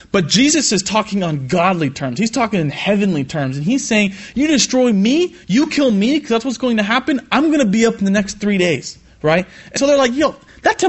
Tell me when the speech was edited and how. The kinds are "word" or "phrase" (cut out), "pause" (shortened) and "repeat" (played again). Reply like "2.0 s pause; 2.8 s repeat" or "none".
9.8 s word